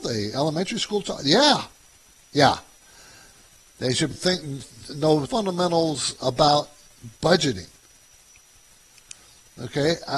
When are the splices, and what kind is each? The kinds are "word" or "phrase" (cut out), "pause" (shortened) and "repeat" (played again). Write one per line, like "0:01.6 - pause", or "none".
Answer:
0:04.1 - word
0:05.3 - word